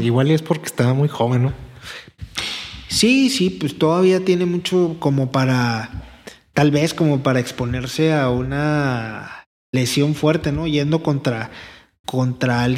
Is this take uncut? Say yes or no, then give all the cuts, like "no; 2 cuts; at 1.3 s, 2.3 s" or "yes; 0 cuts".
yes; 0 cuts